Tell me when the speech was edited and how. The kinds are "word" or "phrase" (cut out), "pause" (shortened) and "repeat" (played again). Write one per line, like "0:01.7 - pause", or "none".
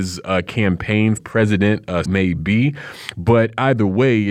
0:01.2 - word
0:02.0 - word